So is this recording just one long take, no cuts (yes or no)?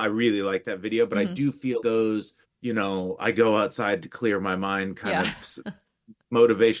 no